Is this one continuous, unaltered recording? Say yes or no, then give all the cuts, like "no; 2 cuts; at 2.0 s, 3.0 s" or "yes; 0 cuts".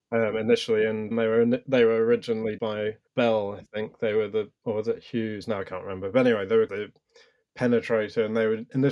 no; 5 cuts; at 1.1 s, 2.6 s, 3.1 s, 4.6 s, 6.7 s